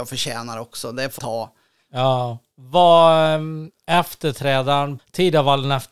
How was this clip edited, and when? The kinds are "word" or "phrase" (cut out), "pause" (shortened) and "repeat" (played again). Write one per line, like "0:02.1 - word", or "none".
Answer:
0:01.2 - word
0:05.0 - word